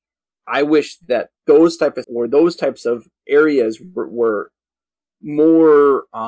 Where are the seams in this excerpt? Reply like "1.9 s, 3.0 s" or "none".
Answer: 1.4 s, 2.0 s